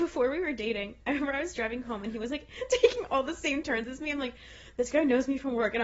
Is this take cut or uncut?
uncut